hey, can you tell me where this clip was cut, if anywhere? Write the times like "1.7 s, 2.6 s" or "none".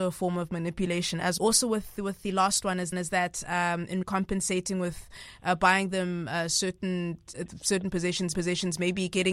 1.4 s, 2.9 s, 4.0 s, 8.3 s

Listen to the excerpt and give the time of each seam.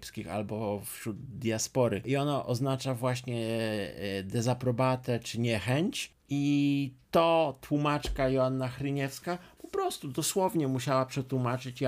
7.0 s

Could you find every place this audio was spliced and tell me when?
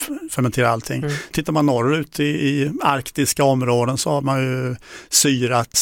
none

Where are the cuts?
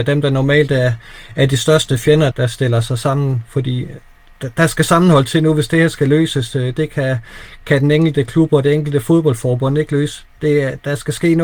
2.3 s

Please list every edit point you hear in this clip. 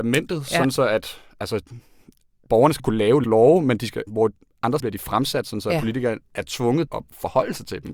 2.5 s, 2.8 s, 3.2 s, 4.1 s, 4.8 s, 6.9 s

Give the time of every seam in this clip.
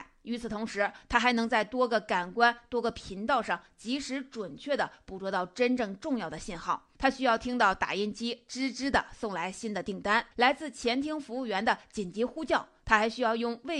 6.9 s, 10.3 s

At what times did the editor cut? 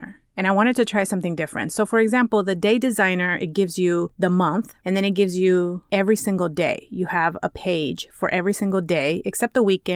none

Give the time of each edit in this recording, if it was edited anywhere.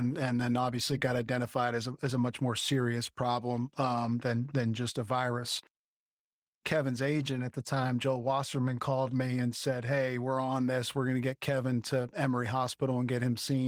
none

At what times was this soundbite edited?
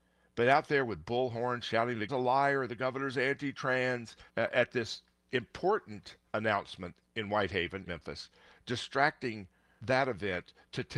2.1 s, 4.3 s, 6.3 s, 7.9 s, 9.8 s

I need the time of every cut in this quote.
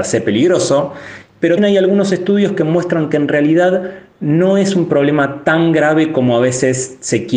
1.6 s

